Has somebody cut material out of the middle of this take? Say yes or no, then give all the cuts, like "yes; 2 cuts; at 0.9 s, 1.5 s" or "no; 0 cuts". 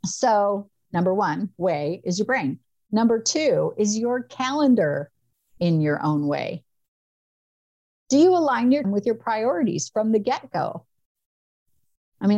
yes; 2 cuts; at 5.6 s, 8.8 s